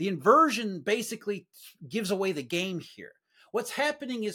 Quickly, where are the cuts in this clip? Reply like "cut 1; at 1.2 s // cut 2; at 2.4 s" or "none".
none